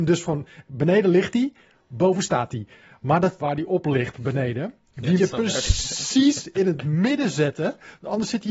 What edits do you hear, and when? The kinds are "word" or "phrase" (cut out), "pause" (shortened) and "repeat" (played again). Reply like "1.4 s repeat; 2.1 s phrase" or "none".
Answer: 3.4 s word; 5.2 s word